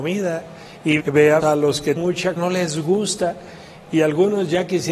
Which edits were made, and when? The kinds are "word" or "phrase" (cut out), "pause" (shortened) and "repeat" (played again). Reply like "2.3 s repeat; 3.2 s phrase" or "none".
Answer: 1.0 s word; 1.4 s word; 2.0 s word; 2.4 s word